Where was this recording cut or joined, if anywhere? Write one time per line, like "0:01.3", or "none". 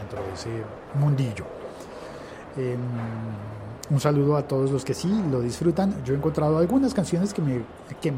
none